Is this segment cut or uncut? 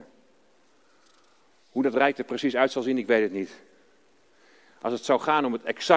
uncut